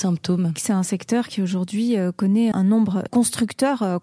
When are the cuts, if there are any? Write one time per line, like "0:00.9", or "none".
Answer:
0:02.5
0:03.1

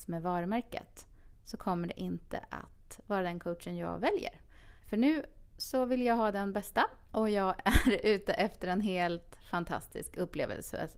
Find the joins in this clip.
0:04.8

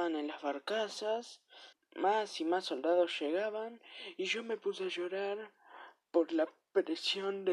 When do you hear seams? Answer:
0:01.7

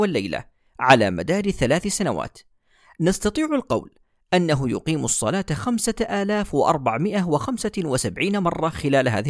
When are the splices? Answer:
none

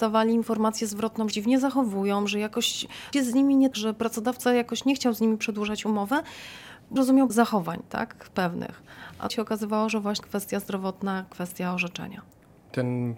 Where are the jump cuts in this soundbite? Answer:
0:01.3
0:03.1
0:03.7
0:07.0
0:07.3
0:09.3
0:10.2

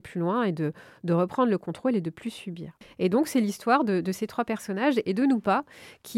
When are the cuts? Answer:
none

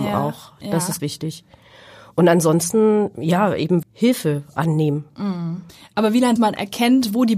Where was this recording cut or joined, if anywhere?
0:01.0
0:03.8
0:05.7
0:06.4

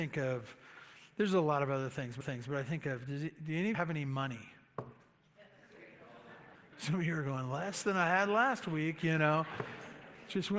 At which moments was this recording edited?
0:02.2
0:03.7
0:06.5

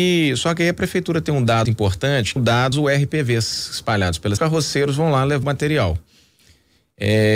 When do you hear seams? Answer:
0:01.6
0:02.4
0:02.7
0:04.4
0:05.4

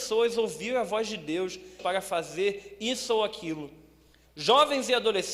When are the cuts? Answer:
0:01.8

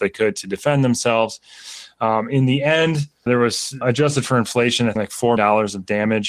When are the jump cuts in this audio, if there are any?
0:03.3
0:03.8
0:05.0
0:05.4

